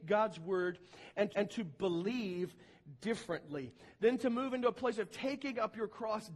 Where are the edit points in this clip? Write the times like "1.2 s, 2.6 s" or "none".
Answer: 1.3 s